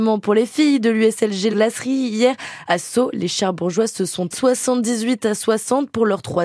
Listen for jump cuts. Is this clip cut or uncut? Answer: cut